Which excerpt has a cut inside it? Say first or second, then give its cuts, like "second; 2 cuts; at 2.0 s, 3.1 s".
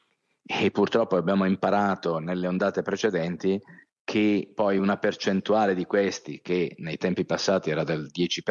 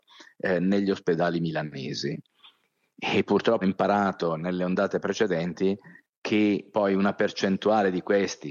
second; 1 cut; at 3.6 s